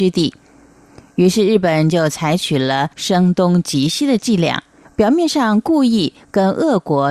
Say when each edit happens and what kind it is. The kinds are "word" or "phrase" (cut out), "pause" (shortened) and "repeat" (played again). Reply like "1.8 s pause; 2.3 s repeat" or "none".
2.9 s pause; 4.8 s pause